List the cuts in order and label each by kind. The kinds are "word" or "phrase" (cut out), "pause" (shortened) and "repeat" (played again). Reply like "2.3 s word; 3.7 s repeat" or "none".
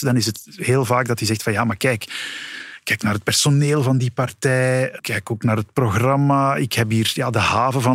none